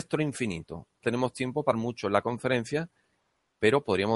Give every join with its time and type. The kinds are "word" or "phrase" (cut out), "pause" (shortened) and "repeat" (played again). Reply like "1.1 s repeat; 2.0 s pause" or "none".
1.0 s word; 1.7 s word